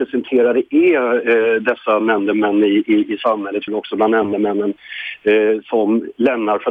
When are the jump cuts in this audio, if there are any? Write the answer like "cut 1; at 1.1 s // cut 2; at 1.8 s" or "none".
cut 1; at 3.7 s